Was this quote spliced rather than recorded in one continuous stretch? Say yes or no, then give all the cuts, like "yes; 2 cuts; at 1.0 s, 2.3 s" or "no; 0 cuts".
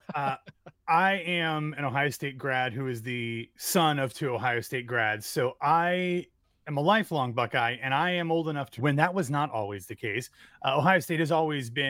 yes; 1 cut; at 8.8 s